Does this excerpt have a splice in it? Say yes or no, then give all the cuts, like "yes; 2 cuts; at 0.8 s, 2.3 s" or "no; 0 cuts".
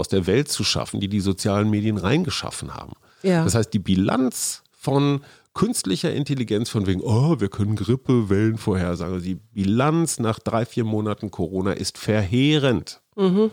no; 0 cuts